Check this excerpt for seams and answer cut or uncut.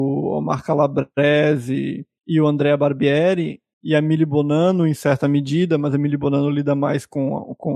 uncut